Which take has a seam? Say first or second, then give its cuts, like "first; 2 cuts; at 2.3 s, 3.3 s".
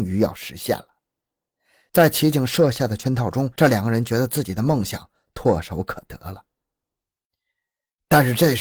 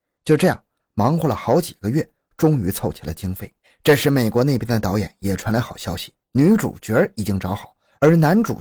second; 2 cuts; at 3.6 s, 6.2 s